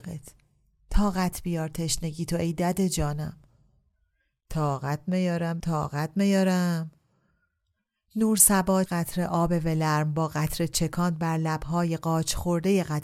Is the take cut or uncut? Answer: cut